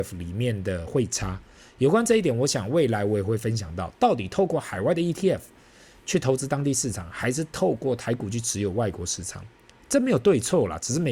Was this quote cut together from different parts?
no; 0 cuts

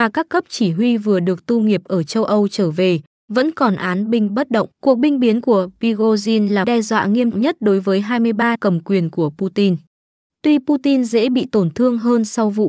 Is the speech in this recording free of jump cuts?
no; 4 cuts; at 4.7 s, 6.6 s, 7.3 s, 8.5 s

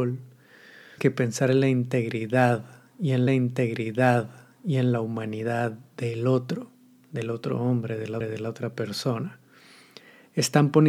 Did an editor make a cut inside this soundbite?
yes; 3 cuts; at 1.0 s, 3.3 s, 8.2 s

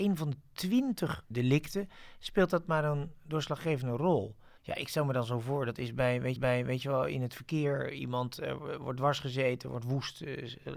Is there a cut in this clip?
yes; 3 cuts; at 1.3 s, 4.6 s, 6.4 s

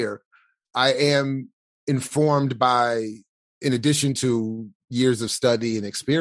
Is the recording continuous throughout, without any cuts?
yes; 0 cuts

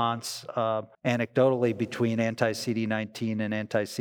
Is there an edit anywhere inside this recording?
yes; 1 cut; at 0.9 s

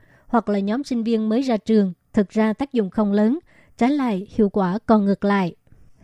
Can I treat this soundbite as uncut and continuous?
yes; 0 cuts

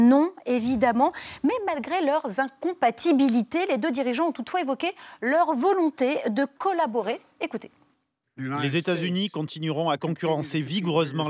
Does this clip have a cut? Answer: yes; 1 cut; at 7.9 s

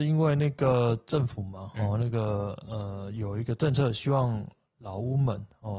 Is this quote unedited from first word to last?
yes; 0 cuts

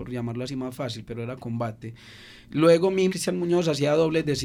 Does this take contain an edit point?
yes; 1 cut; at 3.1 s

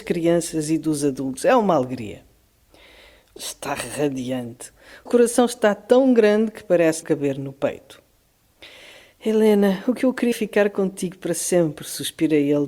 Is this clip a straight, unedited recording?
no; 4 cuts; at 3.4 s, 5.1 s, 7.0 s, 10.3 s

